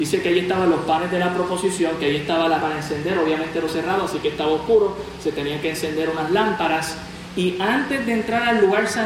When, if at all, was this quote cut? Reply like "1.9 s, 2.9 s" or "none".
2.6 s, 3.7 s